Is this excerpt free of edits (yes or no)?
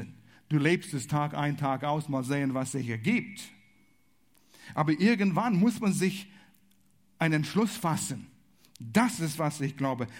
yes